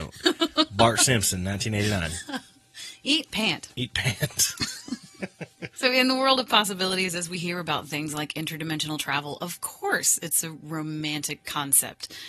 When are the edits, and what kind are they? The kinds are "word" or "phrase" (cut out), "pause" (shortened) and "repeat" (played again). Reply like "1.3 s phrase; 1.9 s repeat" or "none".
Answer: 3.7 s pause